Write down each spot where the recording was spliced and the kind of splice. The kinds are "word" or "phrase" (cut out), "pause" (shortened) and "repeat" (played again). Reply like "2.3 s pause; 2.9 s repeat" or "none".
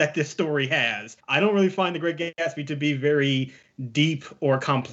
1.2 s pause